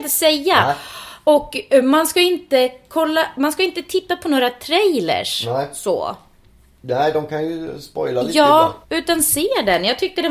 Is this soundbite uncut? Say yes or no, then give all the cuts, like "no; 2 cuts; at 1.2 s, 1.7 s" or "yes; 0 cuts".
no; 1 cut; at 8.8 s